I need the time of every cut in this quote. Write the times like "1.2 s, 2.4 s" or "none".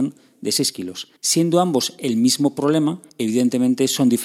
1.2 s, 3.1 s